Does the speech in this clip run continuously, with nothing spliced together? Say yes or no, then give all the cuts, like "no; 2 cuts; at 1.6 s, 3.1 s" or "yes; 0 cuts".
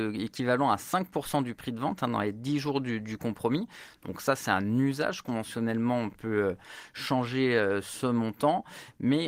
yes; 0 cuts